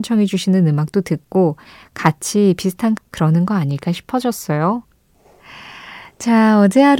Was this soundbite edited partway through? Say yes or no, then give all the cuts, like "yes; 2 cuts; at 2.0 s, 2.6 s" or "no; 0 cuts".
yes; 1 cut; at 3.0 s